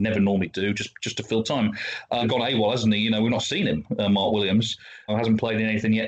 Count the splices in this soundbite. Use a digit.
2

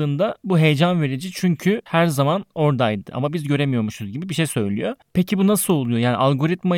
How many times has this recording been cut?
1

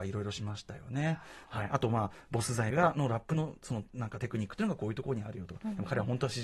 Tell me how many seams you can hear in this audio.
1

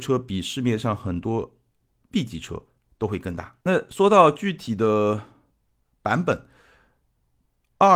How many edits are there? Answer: 1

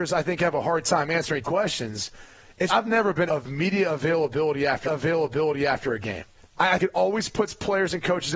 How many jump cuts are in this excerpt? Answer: 6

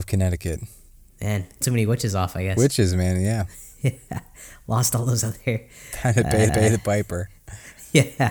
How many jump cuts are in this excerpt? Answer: 2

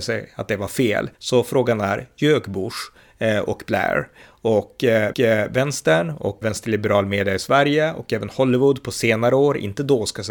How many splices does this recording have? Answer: 3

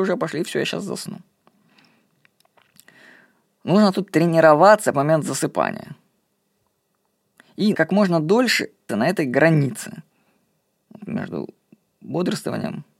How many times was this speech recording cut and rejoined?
3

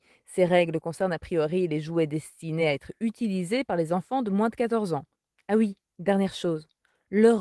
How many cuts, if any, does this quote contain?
0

